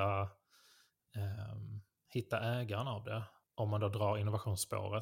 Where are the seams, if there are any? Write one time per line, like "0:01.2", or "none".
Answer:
0:03.4